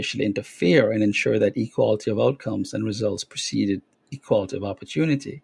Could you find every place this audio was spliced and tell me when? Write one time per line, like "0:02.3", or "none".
0:03.9

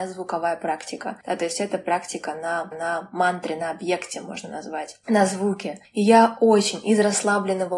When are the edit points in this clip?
0:02.7

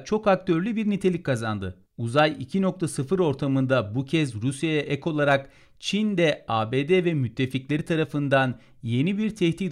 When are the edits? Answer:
0:01.9

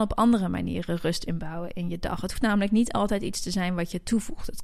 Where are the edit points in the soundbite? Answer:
0:02.4

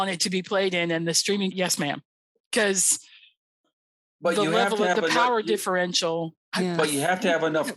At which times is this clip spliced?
0:01.5

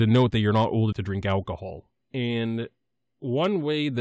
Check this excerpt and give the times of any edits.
0:00.9
0:02.0

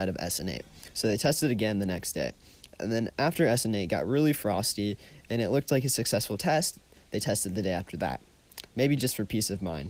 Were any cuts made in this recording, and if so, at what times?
none

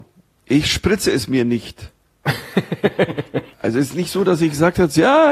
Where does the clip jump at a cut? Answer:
0:03.5

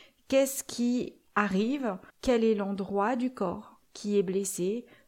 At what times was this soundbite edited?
0:02.1
0:03.8

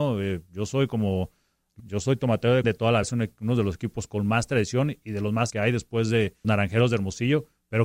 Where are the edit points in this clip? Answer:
0:01.8
0:02.6
0:03.0
0:05.5
0:06.4

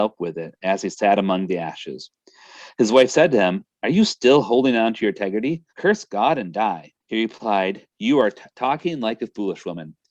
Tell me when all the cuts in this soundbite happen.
0:05.7
0:07.0
0:07.9

